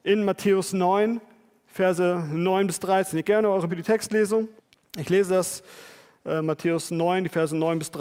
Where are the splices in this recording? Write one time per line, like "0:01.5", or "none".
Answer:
0:03.2
0:03.7
0:04.6